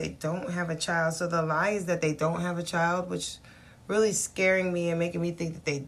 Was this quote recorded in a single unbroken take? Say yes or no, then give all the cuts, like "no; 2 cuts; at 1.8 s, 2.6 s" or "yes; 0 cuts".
yes; 0 cuts